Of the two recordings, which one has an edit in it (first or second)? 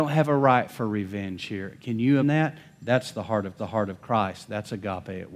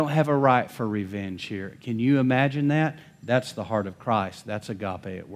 first